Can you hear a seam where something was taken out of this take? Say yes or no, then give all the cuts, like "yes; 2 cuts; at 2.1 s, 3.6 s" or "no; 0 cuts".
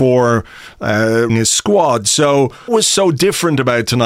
yes; 2 cuts; at 1.3 s, 2.7 s